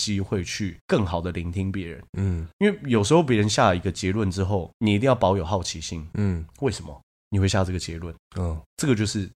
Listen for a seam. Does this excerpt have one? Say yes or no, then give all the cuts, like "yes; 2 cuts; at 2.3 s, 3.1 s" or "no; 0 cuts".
yes; 1 cut; at 6.5 s